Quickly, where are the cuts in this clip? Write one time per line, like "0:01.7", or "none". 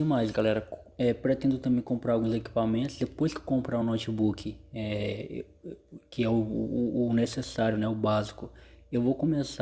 none